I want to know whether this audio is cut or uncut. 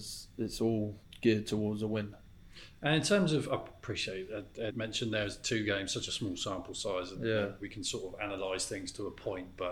cut